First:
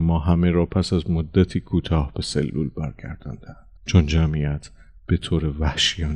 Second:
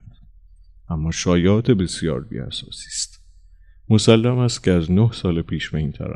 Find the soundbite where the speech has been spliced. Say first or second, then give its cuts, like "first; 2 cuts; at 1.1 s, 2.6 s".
first; 1 cut; at 3.8 s